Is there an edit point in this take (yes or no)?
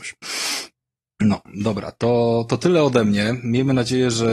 no